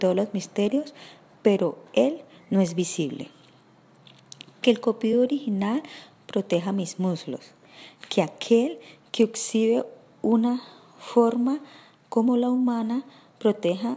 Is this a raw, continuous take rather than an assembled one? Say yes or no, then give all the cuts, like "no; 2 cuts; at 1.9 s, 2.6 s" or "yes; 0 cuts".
yes; 0 cuts